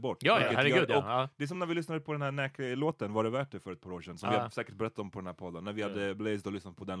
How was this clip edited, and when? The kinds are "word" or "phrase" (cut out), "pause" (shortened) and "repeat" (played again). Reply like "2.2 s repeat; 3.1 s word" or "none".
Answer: none